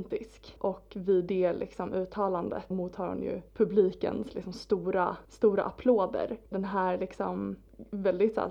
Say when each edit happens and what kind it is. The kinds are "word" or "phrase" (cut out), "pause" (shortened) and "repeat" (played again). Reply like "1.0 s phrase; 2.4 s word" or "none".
2.7 s word; 3.5 s pause; 5.2 s pause; 6.5 s word